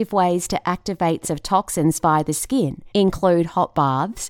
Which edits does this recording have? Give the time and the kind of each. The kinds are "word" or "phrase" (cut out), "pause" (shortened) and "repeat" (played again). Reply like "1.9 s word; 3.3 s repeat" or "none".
1.2 s word; 2.9 s pause